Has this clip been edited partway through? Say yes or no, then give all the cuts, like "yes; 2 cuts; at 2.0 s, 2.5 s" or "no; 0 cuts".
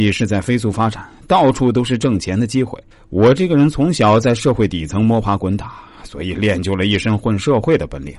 yes; 1 cut; at 2.9 s